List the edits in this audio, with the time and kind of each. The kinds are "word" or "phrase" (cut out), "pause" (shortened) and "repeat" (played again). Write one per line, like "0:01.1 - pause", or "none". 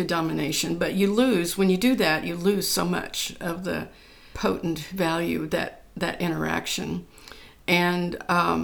none